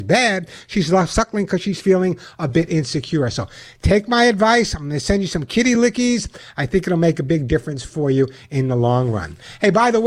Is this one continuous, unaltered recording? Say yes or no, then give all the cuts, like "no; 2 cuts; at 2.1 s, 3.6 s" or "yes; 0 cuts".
yes; 0 cuts